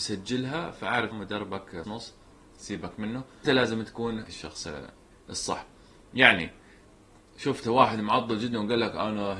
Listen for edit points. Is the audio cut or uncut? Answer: cut